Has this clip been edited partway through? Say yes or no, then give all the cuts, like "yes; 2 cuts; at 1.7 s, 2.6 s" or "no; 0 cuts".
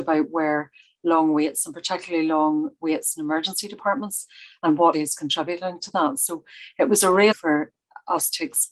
yes; 2 cuts; at 4.9 s, 7.3 s